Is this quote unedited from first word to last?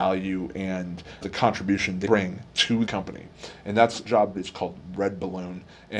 no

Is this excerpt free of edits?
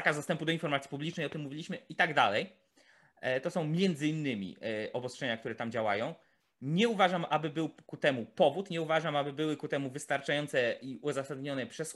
yes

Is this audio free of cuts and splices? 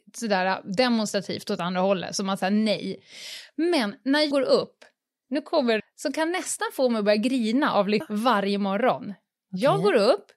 no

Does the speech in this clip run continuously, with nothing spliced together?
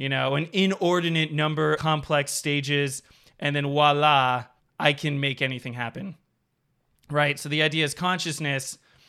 no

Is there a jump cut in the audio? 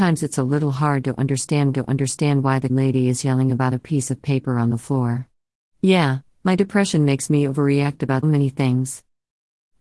yes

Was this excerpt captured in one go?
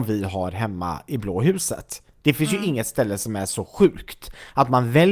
yes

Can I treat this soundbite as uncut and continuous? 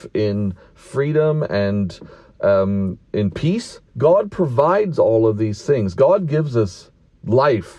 no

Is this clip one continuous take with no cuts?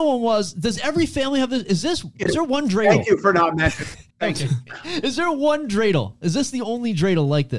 no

